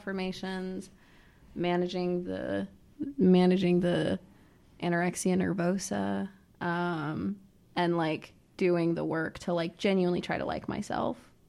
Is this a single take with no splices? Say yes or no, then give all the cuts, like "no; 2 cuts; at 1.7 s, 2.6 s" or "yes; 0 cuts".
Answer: yes; 0 cuts